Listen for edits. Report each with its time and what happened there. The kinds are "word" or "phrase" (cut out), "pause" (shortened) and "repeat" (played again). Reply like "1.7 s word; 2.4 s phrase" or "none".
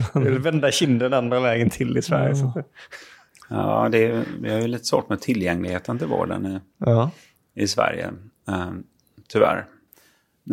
none